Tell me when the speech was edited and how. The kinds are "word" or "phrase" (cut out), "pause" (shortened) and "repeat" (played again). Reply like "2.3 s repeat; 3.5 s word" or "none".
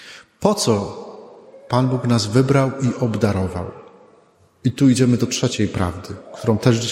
none